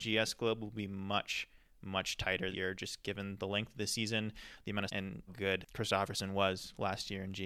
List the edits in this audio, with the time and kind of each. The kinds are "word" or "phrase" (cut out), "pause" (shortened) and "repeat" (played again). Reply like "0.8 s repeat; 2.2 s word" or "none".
2.5 s word; 4.9 s word; 5.3 s word